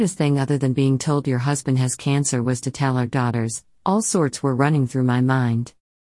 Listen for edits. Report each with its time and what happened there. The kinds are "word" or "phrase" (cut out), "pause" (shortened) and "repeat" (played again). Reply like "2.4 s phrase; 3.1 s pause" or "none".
none